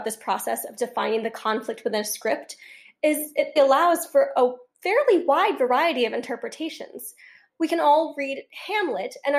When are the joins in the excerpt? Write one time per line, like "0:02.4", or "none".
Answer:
0:03.6